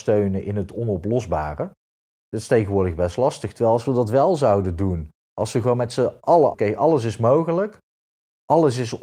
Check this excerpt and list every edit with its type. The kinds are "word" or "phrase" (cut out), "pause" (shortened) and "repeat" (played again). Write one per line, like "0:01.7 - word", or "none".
0:06.5 - word